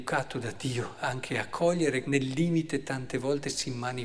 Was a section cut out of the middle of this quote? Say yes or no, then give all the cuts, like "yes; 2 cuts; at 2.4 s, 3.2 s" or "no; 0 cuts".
yes; 1 cut; at 2.0 s